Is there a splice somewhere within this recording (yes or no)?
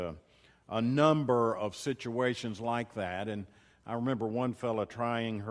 no